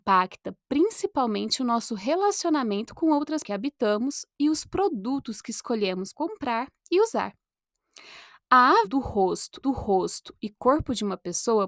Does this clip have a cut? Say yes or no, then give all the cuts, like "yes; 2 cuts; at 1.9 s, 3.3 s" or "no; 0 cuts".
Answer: yes; 4 cuts; at 3.4 s, 6.1 s, 8.8 s, 9.6 s